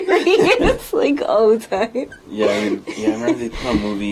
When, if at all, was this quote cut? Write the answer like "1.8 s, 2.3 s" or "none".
none